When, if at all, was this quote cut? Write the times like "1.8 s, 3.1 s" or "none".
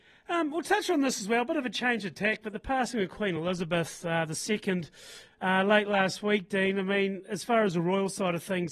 none

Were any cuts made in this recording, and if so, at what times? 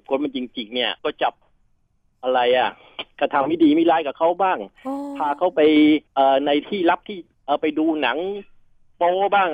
1.0 s, 6.1 s, 7.3 s

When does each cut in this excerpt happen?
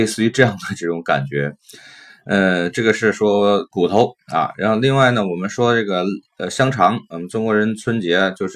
none

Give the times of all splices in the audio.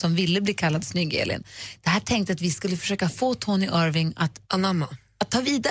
4.4 s

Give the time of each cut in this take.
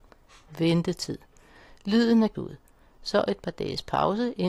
2.4 s

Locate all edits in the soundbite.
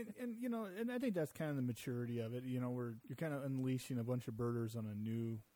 3.0 s

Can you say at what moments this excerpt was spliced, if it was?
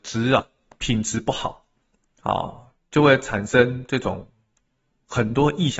none

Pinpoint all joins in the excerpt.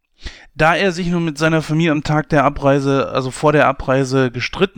none

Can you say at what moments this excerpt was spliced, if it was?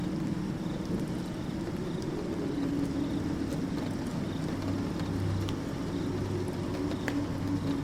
none

